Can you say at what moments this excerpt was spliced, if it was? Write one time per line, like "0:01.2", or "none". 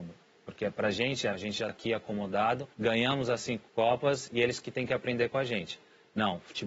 0:01.3
0:01.7
0:02.7